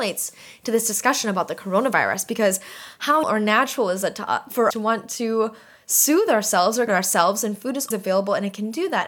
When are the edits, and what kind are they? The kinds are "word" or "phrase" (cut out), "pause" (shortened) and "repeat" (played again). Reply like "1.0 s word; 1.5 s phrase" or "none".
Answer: 3.2 s word; 4.7 s word; 6.9 s word; 7.9 s word